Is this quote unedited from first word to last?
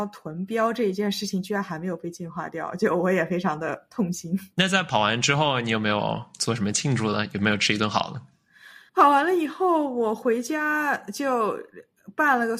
no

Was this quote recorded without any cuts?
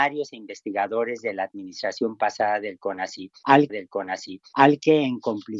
no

